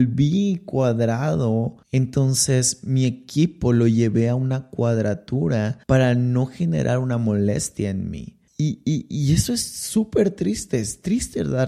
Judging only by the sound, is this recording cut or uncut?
cut